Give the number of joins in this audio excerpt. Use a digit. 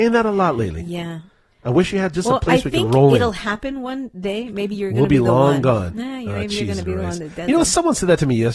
0